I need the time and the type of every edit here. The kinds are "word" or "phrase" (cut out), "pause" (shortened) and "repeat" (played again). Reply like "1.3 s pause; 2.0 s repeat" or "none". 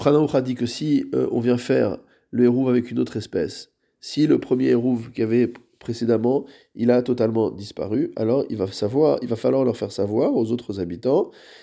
none